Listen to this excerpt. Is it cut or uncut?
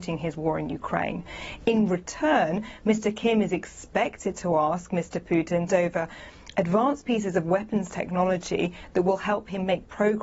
cut